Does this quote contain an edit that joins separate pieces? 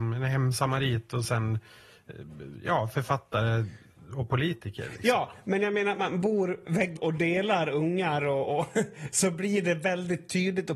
yes; 1 cut; at 7.0 s

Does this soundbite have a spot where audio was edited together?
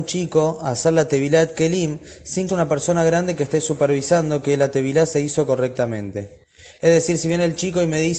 yes; 1 cut; at 2.5 s

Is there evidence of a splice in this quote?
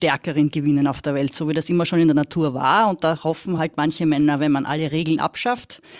no; 0 cuts

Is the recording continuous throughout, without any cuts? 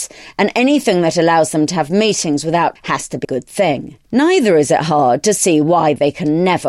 no; 3 cuts; at 2.8 s, 3.2 s, 4.0 s

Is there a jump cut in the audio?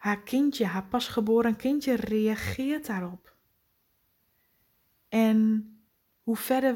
no; 0 cuts

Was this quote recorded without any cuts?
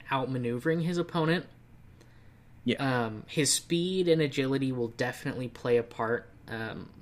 yes; 0 cuts

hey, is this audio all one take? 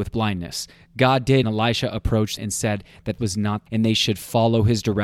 no; 4 cuts; at 1.4 s, 2.4 s, 3.2 s, 3.7 s

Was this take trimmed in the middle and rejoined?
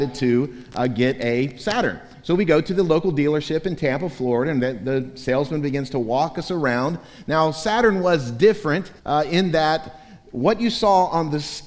yes; 1 cut; at 9.0 s

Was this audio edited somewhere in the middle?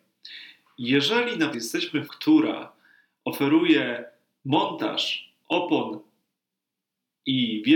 yes; 2 cuts; at 1.5 s, 2.1 s

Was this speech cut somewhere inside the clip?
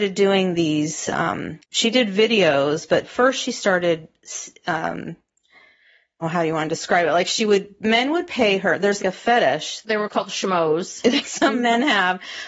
yes; 5 cuts; at 1.6 s, 6.2 s, 9.0 s, 9.8 s, 11.2 s

